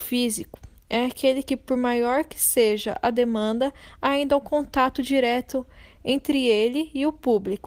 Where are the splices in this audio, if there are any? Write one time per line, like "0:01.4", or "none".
none